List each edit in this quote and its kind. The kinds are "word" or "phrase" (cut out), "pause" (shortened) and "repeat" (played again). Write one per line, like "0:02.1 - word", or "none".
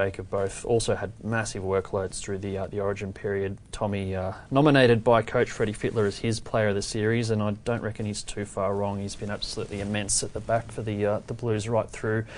none

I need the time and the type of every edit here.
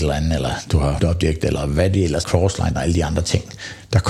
0:01.0 - word
0:02.2 - word
0:02.7 - word

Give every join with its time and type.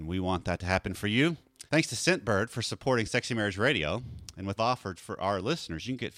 0:01.7 - pause
0:04.6 - phrase
0:05.0 - word

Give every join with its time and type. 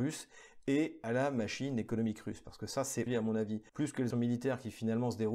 0:03.1 - word
0:03.7 - pause
0:04.1 - word

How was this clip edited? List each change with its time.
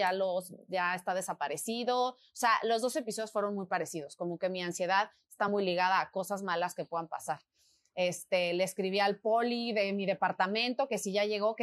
none

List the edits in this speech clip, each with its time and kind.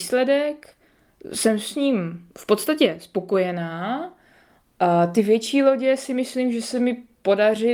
0:02.3 - pause

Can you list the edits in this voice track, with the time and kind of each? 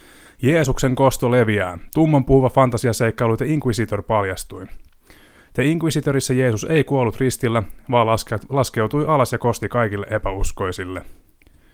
none

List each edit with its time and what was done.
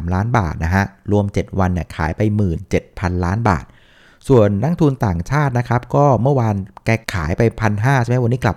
0:07.0 - pause

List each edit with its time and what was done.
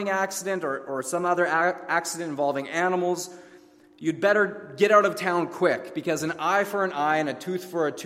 none

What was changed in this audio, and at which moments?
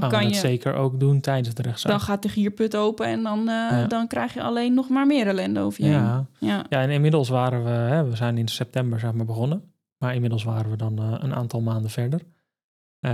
none

